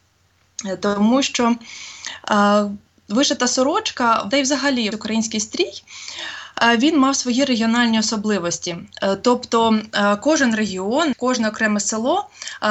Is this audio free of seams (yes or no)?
no